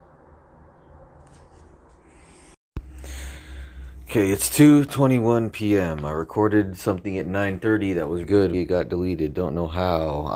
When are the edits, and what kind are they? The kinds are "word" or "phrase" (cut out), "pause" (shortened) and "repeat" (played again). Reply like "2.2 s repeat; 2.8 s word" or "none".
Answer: 8.2 s word; 8.5 s phrase